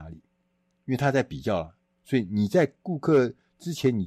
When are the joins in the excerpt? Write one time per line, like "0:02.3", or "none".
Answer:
0:01.9

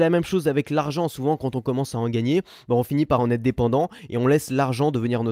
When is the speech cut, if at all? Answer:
none

